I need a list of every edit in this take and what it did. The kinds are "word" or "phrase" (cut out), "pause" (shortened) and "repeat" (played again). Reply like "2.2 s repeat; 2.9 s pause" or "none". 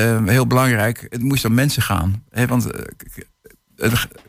none